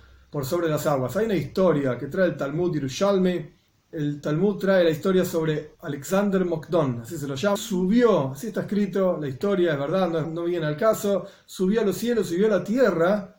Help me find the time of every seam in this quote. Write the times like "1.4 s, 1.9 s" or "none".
3.7 s, 5.8 s, 7.6 s, 10.2 s